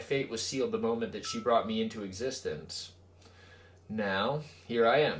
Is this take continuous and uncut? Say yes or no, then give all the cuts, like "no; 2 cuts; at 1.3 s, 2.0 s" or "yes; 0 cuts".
yes; 0 cuts